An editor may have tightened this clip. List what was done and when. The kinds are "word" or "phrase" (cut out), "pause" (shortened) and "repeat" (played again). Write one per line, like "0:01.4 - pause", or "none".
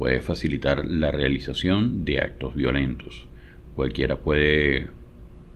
none